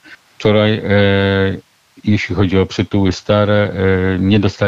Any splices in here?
no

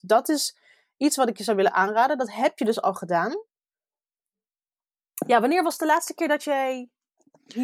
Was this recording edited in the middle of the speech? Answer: no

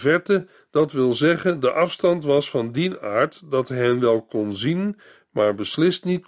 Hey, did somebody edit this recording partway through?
no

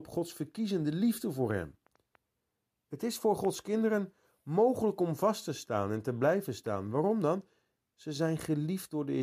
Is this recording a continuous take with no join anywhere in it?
yes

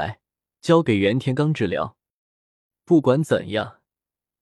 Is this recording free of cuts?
yes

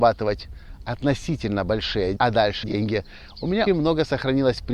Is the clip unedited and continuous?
no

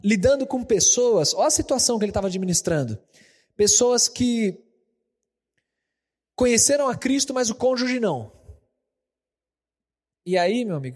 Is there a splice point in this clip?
no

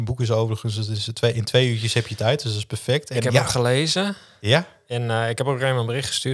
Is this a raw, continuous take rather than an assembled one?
yes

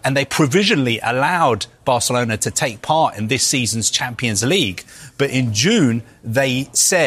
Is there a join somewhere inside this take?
no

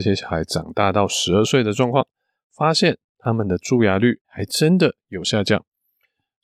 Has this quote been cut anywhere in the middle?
yes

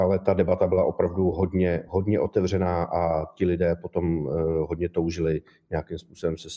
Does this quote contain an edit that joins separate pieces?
no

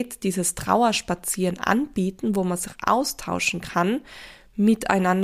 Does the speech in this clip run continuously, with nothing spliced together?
yes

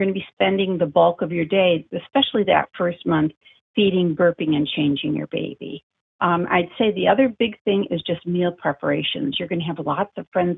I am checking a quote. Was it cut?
no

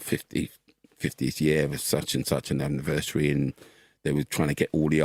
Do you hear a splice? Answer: no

